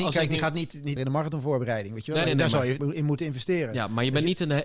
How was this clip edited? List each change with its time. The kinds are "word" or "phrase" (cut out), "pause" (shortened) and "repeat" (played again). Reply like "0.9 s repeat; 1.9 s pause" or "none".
1.0 s phrase; 2.2 s word; 2.8 s word